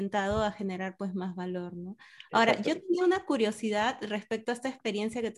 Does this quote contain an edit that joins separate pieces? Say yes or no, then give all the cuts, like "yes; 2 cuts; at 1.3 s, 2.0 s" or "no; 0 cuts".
no; 0 cuts